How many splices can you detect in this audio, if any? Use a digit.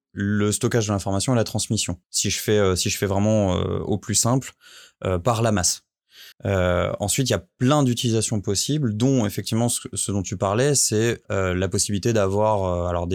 3